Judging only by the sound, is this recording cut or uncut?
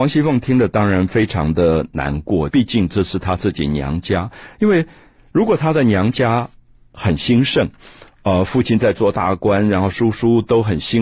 cut